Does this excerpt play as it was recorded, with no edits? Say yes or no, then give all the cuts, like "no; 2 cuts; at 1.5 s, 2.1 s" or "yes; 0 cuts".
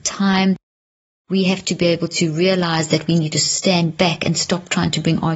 yes; 0 cuts